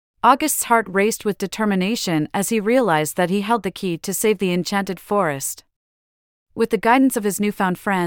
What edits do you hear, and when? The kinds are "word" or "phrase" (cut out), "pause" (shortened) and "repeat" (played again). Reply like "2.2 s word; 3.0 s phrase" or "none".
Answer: none